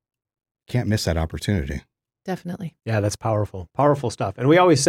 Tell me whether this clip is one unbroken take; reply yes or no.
no